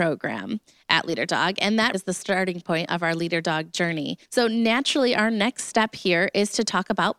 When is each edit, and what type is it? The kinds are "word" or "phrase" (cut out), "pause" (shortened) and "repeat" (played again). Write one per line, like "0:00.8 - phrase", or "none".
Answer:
0:01.9 - word
0:04.2 - pause